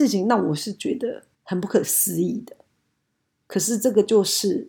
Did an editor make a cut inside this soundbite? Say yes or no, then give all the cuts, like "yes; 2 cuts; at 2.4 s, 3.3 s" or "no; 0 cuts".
yes; 1 cut; at 1.3 s